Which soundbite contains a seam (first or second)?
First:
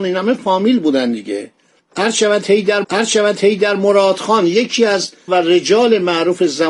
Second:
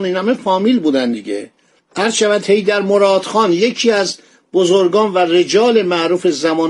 first